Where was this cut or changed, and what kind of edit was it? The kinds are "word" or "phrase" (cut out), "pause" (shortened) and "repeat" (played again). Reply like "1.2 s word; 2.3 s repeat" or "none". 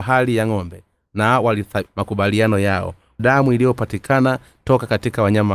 1.9 s word; 3.2 s word